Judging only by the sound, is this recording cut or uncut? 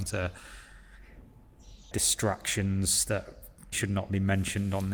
cut